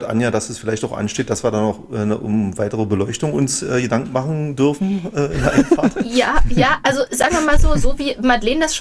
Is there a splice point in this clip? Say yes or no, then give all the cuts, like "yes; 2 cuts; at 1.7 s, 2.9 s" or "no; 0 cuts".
no; 0 cuts